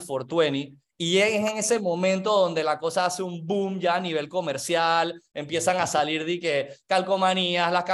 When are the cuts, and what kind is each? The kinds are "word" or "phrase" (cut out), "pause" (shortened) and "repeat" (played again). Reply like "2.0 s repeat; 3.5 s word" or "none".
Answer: none